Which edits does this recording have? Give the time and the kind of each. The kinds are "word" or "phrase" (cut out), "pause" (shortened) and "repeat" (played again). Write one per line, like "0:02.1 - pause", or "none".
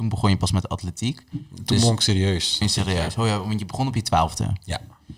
0:02.6 - word